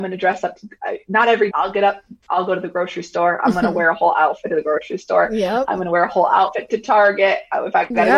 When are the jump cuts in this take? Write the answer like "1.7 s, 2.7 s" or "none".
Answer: 1.5 s, 2.2 s